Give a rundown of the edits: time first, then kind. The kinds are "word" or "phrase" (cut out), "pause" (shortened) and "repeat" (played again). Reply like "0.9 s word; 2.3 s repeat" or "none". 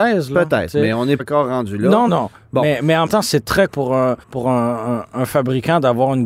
1.2 s word; 2.1 s word; 3.1 s word; 3.7 s word; 4.2 s pause